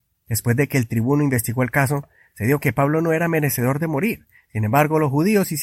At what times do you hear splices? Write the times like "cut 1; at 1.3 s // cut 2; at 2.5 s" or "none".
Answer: cut 1; at 2.6 s